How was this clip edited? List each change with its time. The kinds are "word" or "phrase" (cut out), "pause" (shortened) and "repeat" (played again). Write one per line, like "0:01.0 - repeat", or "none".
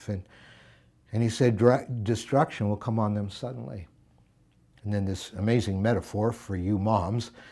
none